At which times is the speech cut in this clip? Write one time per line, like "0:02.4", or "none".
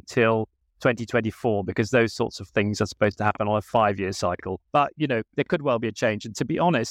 0:04.7